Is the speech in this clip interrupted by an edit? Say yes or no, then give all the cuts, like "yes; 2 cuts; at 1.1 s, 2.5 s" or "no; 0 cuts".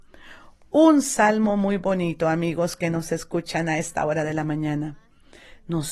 no; 0 cuts